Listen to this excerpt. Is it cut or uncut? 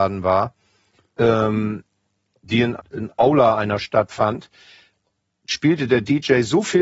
cut